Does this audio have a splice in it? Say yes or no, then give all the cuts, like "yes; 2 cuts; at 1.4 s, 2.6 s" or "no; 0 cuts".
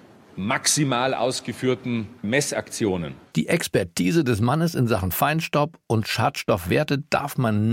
yes; 1 cut; at 2.2 s